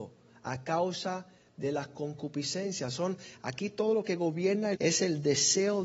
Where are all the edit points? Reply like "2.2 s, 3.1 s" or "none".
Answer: 4.7 s